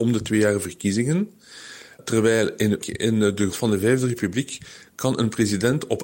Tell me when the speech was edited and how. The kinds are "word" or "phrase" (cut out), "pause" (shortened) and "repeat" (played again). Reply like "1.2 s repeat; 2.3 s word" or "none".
2.8 s word; 3.5 s word

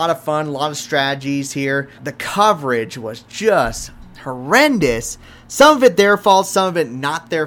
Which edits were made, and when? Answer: 2.0 s word; 4.1 s pause

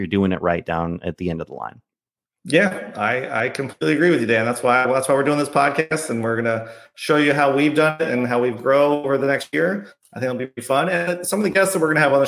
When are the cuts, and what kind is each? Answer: none

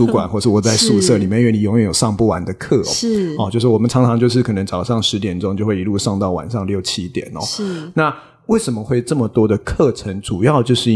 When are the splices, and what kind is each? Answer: none

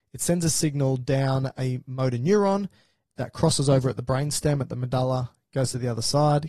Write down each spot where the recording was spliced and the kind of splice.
none

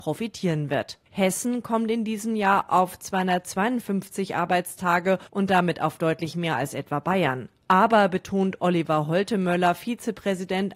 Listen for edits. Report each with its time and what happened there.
1.1 s pause; 5.3 s pause

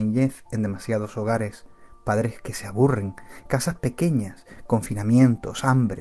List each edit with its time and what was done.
none

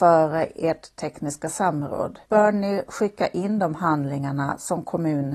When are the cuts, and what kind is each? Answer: 2.2 s pause

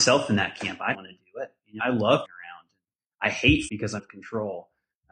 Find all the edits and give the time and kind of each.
0.9 s word; 1.8 s word; 2.2 s word; 3.7 s word; 4.0 s word

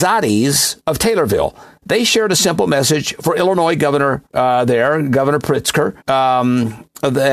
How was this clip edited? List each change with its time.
4.3 s pause; 6.0 s pause

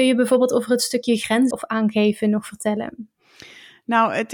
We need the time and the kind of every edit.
1.5 s word

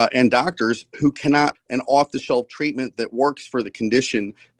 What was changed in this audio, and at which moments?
1.5 s word

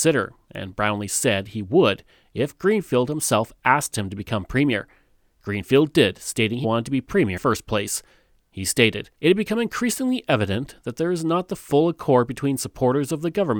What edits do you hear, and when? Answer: 6.6 s word; 7.4 s phrase; 9.1 s pause

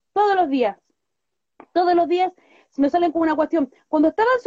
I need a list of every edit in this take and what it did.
none

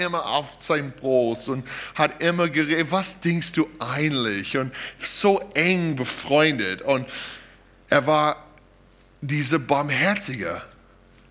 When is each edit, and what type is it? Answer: none

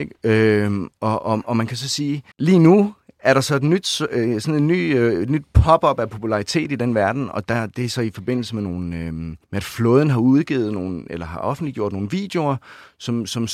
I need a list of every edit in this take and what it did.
2.3 s pause; 9.4 s pause

